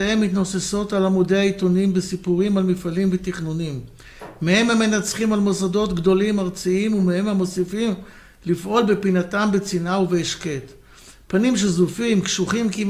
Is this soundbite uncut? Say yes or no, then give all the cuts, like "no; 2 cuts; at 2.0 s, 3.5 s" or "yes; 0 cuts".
yes; 0 cuts